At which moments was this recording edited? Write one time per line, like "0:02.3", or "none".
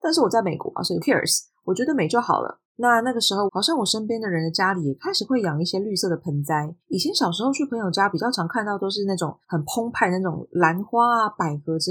0:01.0
0:02.6
0:03.5
0:06.8
0:09.4